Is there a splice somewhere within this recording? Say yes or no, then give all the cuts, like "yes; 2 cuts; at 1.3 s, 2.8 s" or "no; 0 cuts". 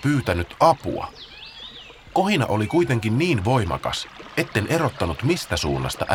yes; 1 cut; at 2.0 s